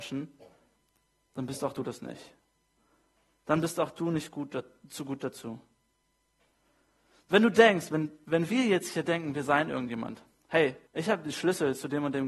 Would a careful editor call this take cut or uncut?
cut